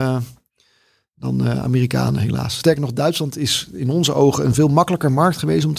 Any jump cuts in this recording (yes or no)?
no